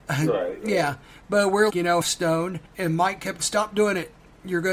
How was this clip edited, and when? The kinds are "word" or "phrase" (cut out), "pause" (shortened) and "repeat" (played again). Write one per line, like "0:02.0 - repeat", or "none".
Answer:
0:01.7 - word
0:02.0 - word
0:02.7 - pause
0:03.4 - word